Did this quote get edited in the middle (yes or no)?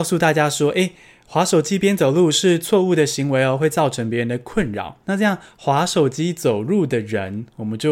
yes